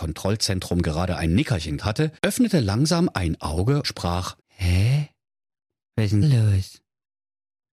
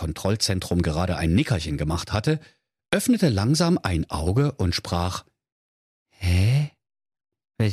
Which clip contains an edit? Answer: first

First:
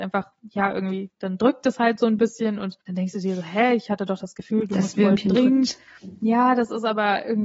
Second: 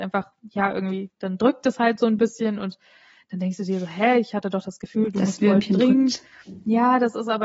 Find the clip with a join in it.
first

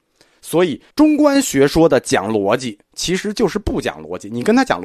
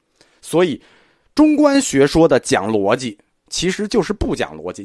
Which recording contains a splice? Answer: first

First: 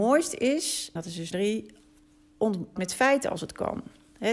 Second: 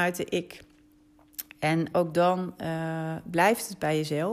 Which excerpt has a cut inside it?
first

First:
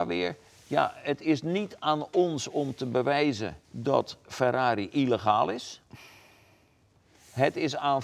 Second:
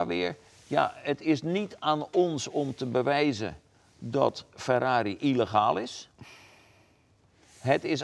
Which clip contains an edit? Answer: first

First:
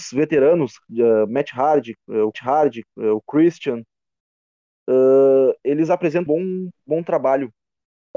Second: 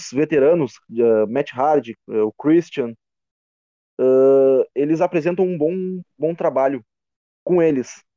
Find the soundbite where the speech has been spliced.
first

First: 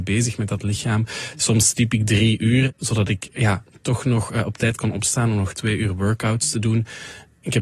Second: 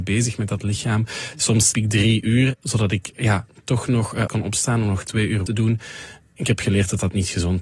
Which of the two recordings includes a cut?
second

